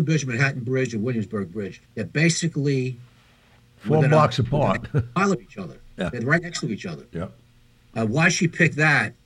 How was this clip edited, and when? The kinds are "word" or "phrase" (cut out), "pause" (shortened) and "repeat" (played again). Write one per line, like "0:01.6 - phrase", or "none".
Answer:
0:01.9 - pause